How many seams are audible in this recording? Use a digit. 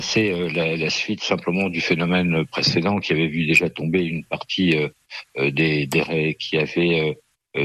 1